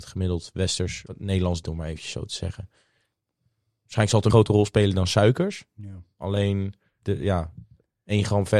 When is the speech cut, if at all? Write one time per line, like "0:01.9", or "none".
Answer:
0:01.1
0:01.6
0:04.3
0:07.0